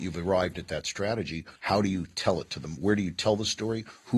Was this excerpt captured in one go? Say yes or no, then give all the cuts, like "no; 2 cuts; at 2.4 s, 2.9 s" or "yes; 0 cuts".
no; 1 cut; at 1.6 s